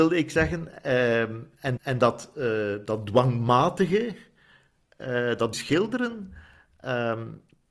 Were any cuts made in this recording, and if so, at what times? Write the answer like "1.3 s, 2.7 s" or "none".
1.8 s, 5.5 s